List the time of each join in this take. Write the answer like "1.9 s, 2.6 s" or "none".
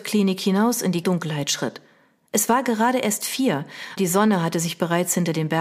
1.0 s, 4.0 s

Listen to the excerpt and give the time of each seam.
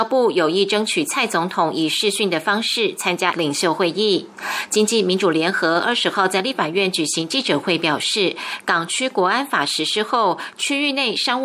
3.3 s

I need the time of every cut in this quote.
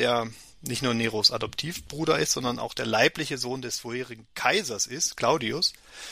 none

